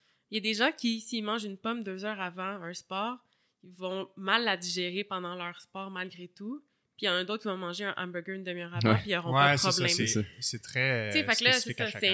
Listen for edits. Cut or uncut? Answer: uncut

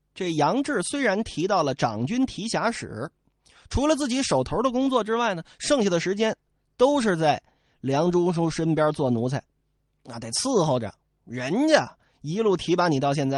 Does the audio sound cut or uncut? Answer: uncut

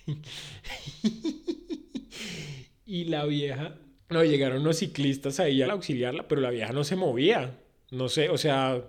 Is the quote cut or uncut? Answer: cut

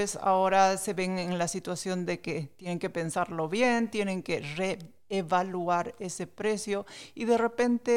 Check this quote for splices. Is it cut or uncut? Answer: uncut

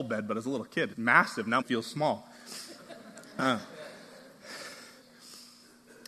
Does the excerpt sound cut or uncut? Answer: cut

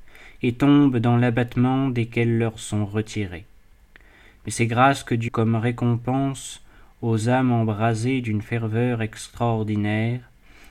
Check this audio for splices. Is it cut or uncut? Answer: cut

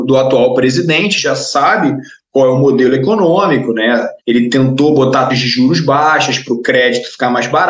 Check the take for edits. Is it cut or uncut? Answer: cut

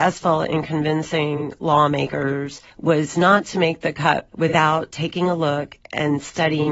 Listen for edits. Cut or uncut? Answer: cut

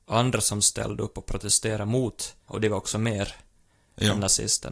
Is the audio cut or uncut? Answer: cut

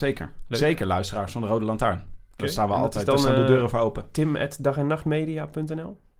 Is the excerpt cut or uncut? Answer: uncut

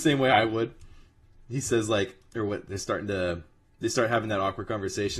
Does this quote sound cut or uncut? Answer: uncut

